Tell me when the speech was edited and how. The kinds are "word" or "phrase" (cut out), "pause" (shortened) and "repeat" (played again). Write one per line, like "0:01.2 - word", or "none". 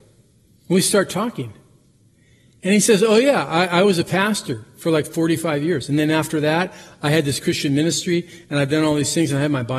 none